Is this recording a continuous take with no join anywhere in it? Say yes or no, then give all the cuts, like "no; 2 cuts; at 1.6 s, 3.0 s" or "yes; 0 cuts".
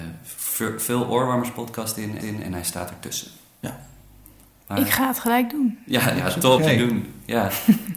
no; 2 cuts; at 2.2 s, 6.6 s